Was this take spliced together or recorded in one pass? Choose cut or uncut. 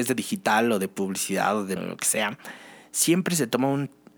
cut